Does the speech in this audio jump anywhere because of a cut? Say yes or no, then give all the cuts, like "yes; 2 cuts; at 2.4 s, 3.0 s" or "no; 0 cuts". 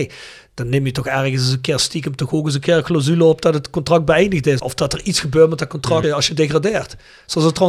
no; 0 cuts